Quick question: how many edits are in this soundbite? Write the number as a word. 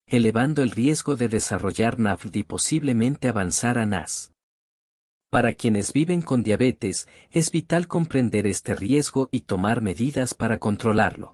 zero